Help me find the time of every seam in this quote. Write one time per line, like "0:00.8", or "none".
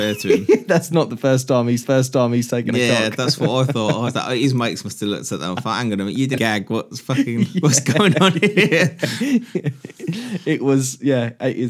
0:01.8
0:04.1
0:06.4

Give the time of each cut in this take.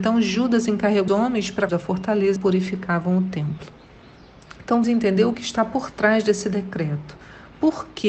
0:01.1
0:01.7
0:02.4
0:04.8
0:05.3

